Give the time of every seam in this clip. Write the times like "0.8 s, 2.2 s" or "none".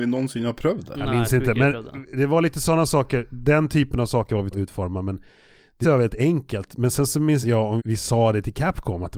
4.5 s, 5.8 s, 7.4 s, 7.8 s